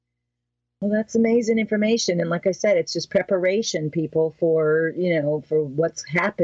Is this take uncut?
yes; 0 cuts

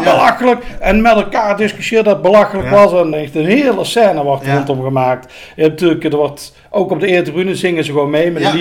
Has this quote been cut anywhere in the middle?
yes; 1 cut; at 3.1 s

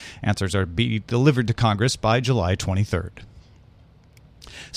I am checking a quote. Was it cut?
no; 0 cuts

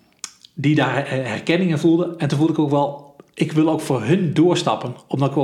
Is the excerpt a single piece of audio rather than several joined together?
yes; 0 cuts

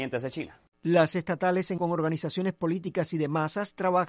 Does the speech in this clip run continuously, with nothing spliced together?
no; 2 cuts; at 1.1 s, 1.8 s

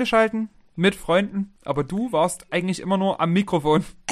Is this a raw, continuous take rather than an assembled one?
yes; 0 cuts

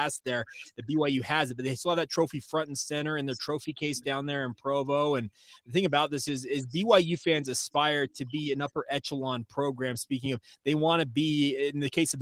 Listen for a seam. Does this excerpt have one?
no; 0 cuts

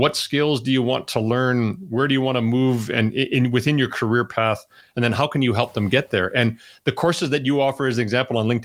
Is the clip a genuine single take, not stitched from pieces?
yes; 0 cuts

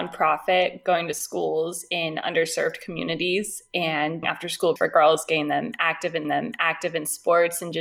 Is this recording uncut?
no; 3 cuts; at 4.2 s, 4.8 s, 6.2 s

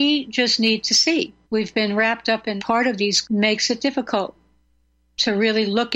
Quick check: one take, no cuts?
no; 3 cuts; at 1.4 s, 2.6 s, 3.2 s

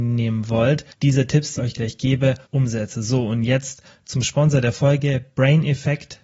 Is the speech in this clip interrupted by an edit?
yes; 3 cuts; at 0.9 s, 1.6 s, 2.4 s

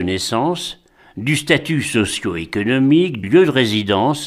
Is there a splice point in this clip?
yes; 1 cut; at 3.2 s

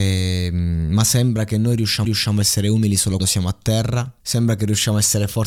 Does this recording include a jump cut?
yes; 3 cuts; at 2.0 s, 3.2 s, 4.2 s

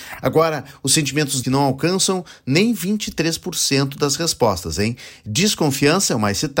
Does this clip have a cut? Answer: yes; 1 cut; at 1.4 s

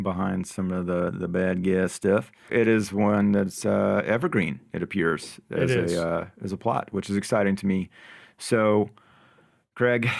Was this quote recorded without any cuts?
no; 1 cut; at 2.5 s

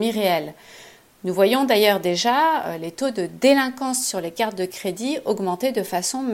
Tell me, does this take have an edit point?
no; 0 cuts

